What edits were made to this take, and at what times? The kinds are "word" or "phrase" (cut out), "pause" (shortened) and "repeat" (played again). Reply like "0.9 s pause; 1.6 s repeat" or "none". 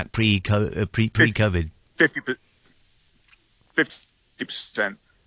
none